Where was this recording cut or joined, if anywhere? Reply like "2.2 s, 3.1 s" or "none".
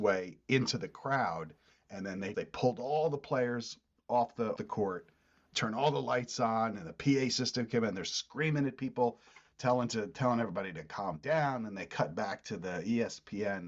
2.3 s, 4.6 s, 5.5 s